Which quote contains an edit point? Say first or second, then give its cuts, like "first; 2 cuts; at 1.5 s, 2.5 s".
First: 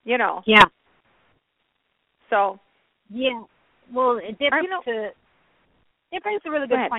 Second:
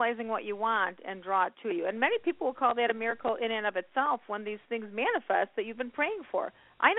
first; 1 cut; at 4.6 s